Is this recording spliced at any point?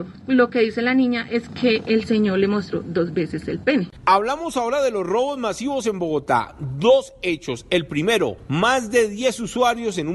no; 0 cuts

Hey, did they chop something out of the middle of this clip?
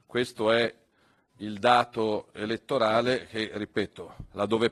no; 0 cuts

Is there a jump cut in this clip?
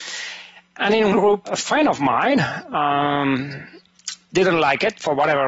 yes; 2 cuts; at 1.1 s, 1.4 s

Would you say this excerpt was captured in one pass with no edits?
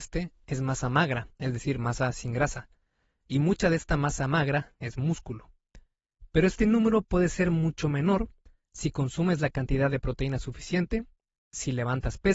yes; 0 cuts

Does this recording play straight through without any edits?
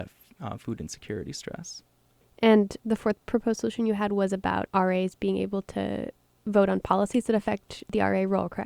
yes; 0 cuts

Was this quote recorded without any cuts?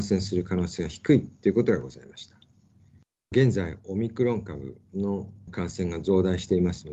yes; 0 cuts

